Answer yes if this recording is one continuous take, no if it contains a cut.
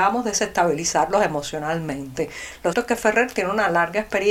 no